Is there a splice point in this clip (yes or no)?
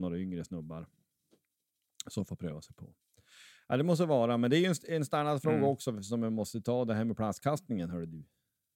no